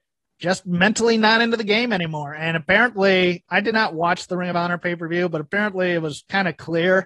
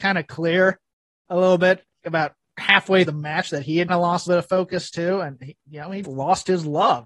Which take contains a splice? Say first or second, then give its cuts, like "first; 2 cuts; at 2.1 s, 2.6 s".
second; 5 cuts; at 2.0 s, 3.1 s, 3.9 s, 4.3 s, 6.0 s